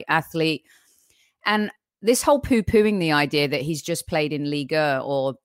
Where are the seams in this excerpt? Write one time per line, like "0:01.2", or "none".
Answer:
none